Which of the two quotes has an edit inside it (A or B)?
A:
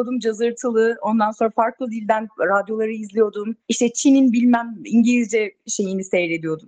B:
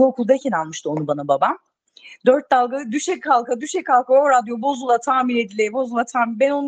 A